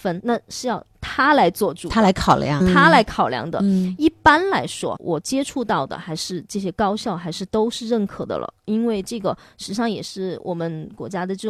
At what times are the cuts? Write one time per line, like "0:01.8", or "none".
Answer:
0:02.6
0:05.0